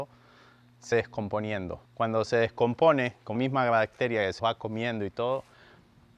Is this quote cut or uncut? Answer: cut